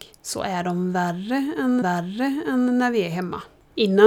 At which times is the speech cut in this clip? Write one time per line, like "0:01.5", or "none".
0:01.8